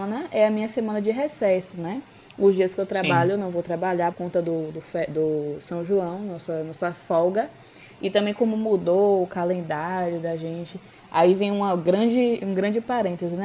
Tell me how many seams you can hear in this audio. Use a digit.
1